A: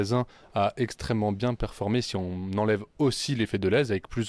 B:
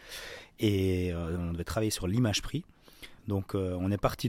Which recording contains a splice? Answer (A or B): B